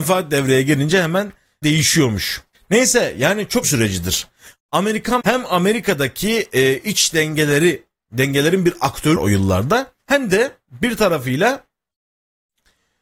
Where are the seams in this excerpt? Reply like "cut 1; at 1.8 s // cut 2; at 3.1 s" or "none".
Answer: cut 1; at 1.6 s // cut 2; at 2.5 s // cut 3; at 3.6 s // cut 4; at 5.2 s // cut 5; at 9.2 s // cut 6; at 10.0 s